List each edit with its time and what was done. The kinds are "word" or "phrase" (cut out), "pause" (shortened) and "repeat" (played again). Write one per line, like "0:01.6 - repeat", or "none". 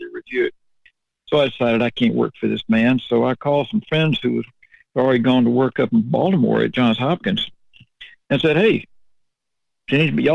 none